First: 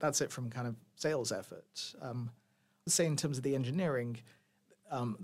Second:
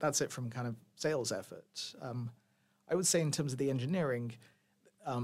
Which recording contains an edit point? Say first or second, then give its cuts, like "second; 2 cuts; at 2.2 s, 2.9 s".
first; 1 cut; at 2.9 s